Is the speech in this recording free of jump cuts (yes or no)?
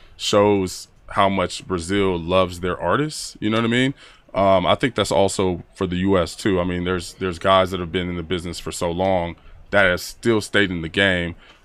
yes